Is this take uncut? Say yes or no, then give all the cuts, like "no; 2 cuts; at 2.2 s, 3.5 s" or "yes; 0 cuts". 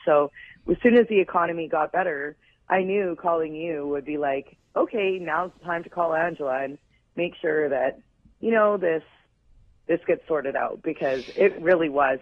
yes; 0 cuts